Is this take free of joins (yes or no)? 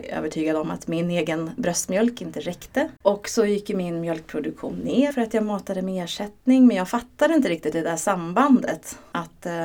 no